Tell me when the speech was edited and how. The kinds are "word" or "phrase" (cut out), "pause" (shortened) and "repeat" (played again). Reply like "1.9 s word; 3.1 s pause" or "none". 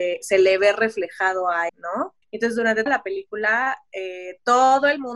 1.7 s word; 2.2 s pause; 2.9 s word